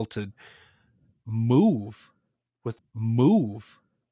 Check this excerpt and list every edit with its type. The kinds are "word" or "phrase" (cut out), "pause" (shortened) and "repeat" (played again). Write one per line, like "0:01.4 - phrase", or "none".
0:02.8 - repeat